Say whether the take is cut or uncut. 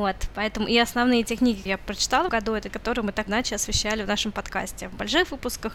cut